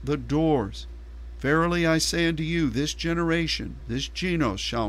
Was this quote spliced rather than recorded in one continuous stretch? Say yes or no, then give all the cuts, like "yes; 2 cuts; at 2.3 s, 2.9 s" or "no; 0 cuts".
no; 0 cuts